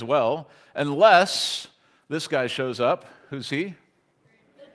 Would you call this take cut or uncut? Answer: uncut